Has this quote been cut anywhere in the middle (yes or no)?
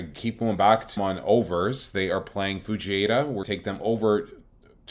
yes